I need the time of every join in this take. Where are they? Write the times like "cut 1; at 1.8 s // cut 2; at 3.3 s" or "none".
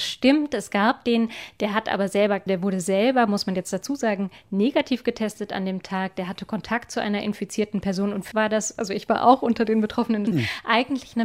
cut 1; at 2.5 s // cut 2; at 8.3 s // cut 3; at 10.3 s